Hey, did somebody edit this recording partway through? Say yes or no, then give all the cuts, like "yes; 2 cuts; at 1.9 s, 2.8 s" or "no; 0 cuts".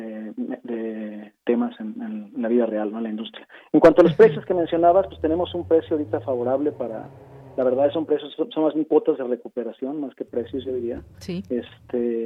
yes; 1 cut; at 1.4 s